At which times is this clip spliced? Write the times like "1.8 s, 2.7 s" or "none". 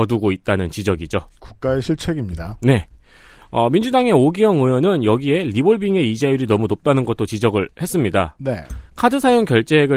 none